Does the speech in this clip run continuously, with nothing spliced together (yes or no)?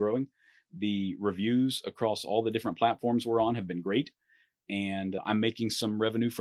yes